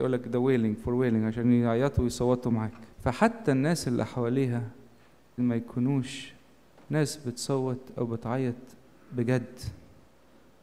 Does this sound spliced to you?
yes; 2 cuts; at 2.9 s, 5.4 s

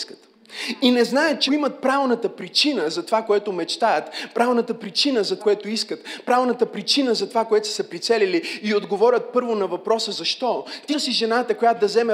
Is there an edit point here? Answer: yes; 3 cuts; at 1.5 s, 5.4 s, 10.9 s

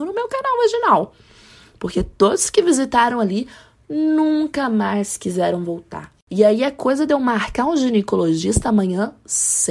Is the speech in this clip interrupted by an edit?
no; 0 cuts

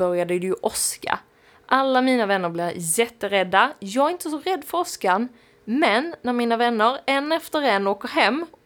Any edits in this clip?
no; 0 cuts

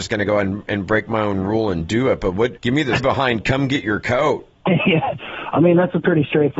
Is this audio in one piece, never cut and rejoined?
no; 2 cuts; at 3.0 s, 4.7 s

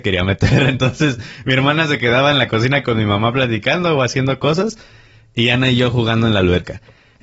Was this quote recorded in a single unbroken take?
yes; 0 cuts

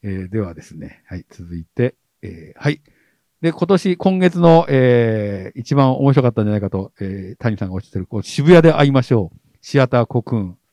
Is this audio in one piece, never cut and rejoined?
yes; 0 cuts

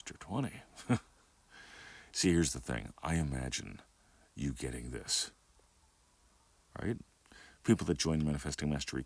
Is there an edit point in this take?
no; 0 cuts

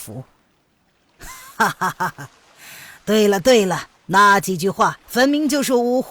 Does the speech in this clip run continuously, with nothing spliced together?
no; 2 cuts; at 4.0 s, 5.0 s

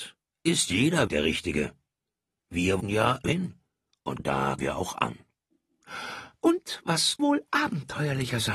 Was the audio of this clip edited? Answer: yes; 6 cuts; at 1.1 s, 2.8 s, 3.2 s, 4.2 s, 4.6 s, 7.2 s

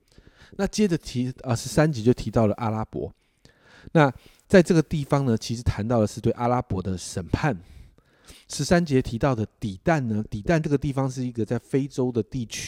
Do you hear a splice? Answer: no; 0 cuts

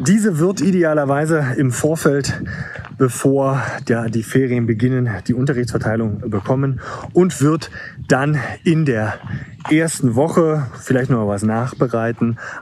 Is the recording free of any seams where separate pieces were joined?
yes; 0 cuts

